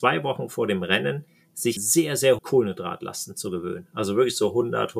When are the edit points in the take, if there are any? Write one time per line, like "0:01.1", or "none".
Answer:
0:01.8
0:02.4